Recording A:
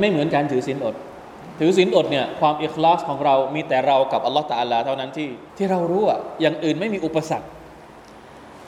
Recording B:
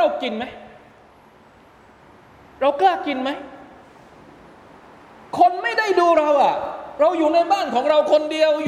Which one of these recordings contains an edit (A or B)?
A